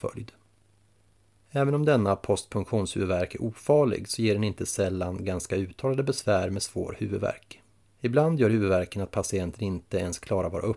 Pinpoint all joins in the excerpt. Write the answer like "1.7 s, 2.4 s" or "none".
7.8 s